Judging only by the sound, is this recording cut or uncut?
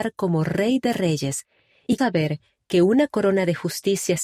cut